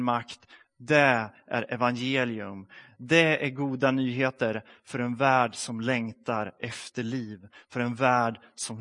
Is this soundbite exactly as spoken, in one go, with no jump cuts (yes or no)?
yes